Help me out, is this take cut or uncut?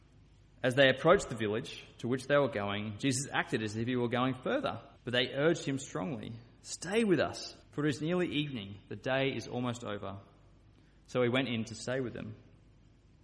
cut